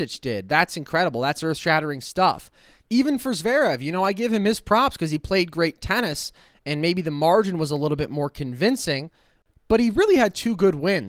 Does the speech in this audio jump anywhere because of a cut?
no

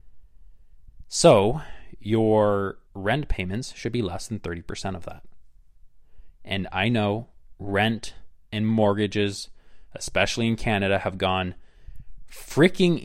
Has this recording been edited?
yes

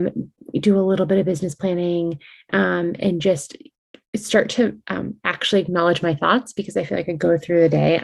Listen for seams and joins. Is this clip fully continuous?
yes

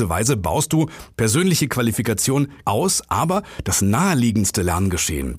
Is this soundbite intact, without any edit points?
no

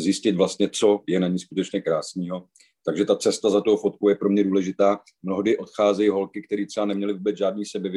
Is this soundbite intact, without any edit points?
yes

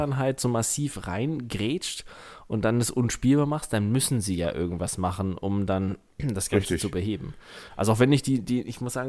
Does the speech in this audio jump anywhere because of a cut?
no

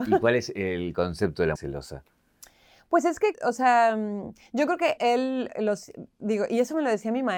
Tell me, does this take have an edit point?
yes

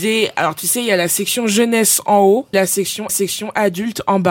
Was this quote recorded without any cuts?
no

